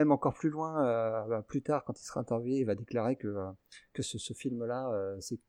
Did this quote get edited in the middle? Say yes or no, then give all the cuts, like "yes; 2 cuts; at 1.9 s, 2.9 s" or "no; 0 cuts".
no; 0 cuts